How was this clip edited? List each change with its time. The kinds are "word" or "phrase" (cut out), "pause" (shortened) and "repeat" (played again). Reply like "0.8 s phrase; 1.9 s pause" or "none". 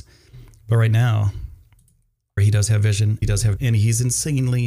2.4 s word; 3.2 s word; 3.6 s word